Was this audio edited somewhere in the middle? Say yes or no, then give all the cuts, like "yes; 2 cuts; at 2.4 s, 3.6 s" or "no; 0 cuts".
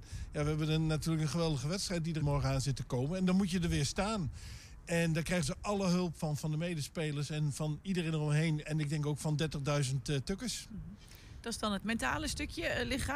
yes; 2 cuts; at 2.2 s, 11.8 s